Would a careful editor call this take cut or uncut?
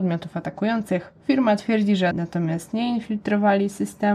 cut